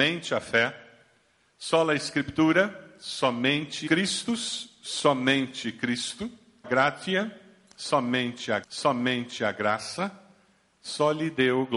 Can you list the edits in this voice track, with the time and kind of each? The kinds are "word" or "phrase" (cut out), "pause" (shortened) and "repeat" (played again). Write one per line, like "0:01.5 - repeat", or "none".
0:03.9 - phrase
0:06.6 - word
0:08.6 - repeat